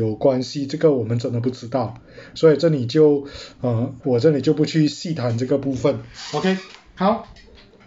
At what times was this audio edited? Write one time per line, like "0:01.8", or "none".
0:04.0